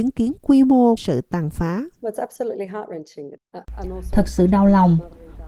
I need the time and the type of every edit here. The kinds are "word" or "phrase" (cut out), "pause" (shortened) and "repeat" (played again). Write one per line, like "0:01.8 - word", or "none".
0:01.0 - word

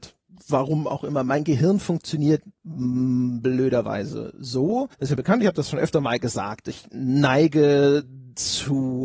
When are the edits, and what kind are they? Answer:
0:04.9 - pause

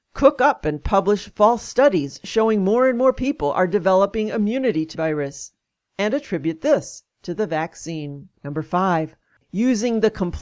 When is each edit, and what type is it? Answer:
0:04.9 - word
0:08.3 - pause

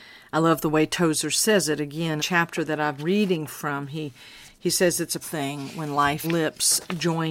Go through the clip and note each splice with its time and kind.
0:02.2 - phrase
0:03.0 - word
0:05.2 - word
0:06.2 - word

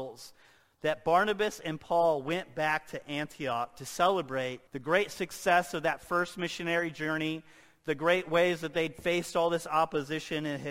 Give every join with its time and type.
0:04.7 - pause

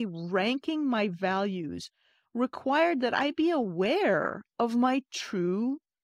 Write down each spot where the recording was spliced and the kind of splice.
none

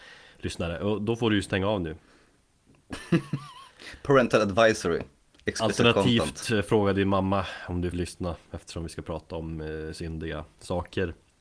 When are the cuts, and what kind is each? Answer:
0:07.9 - word

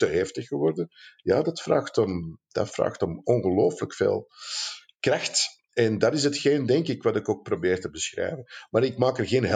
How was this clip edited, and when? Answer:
none

